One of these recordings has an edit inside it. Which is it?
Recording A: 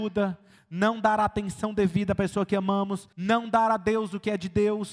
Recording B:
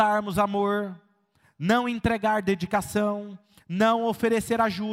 A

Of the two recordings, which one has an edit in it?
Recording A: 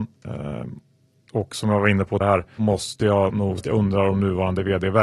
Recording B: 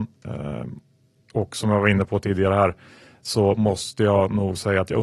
A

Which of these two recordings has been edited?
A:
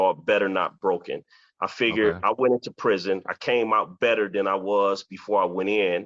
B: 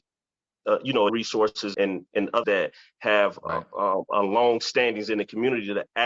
B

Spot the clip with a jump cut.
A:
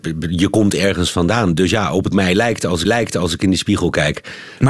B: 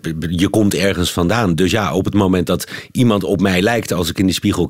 A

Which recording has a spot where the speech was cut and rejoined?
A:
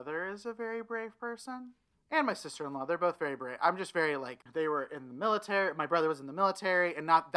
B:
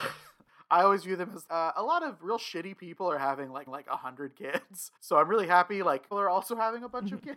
B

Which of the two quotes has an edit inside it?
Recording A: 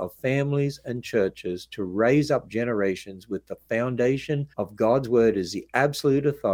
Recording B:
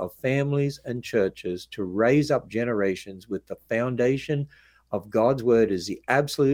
A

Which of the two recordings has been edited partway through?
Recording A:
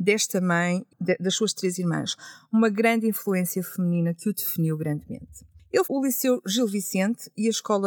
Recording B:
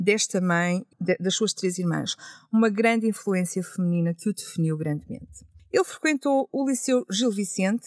A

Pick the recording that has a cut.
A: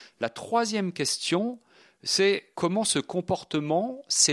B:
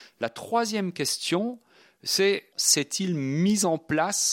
B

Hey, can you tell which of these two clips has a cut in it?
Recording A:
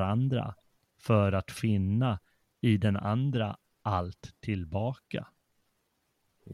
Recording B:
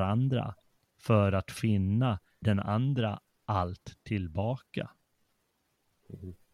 B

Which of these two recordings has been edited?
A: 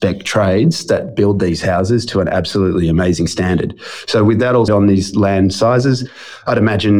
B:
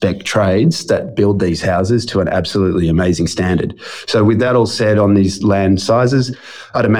A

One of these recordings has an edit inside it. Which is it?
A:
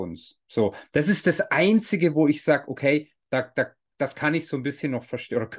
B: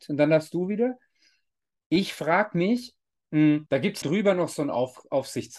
B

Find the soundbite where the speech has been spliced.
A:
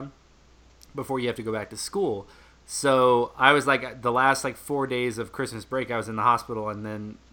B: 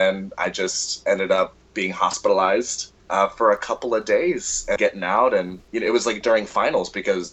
B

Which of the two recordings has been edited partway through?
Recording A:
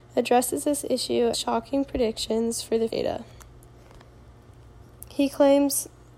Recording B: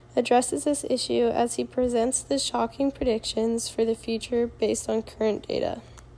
A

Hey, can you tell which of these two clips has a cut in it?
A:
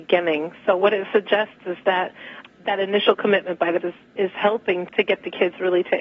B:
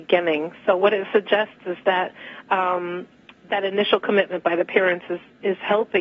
A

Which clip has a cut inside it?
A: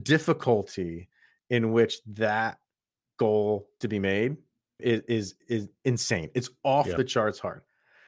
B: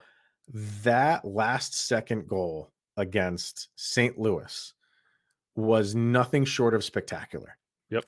A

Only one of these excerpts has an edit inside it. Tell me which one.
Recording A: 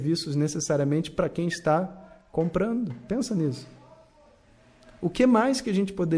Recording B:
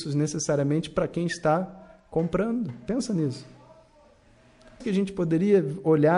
B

